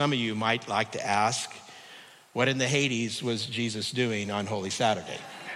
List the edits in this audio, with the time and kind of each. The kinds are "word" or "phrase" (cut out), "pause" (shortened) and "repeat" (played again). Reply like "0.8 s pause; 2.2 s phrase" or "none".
none